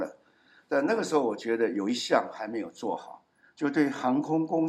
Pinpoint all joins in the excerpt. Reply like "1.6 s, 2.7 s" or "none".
none